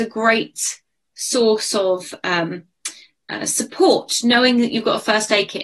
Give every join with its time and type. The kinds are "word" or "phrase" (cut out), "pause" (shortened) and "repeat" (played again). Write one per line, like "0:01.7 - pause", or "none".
none